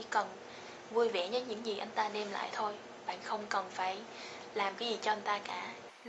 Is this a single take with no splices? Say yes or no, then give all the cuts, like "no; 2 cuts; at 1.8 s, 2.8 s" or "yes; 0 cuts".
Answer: yes; 0 cuts